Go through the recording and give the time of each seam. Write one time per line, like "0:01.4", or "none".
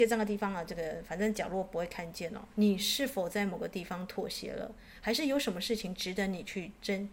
0:02.5